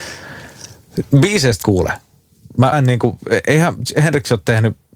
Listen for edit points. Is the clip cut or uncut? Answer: cut